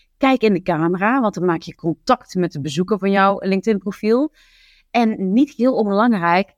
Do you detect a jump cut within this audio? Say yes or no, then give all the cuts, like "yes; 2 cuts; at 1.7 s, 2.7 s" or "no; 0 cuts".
no; 0 cuts